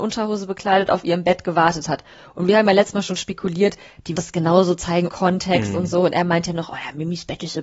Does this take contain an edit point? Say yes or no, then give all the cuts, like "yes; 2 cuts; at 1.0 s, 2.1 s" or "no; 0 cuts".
yes; 2 cuts; at 4.2 s, 5.1 s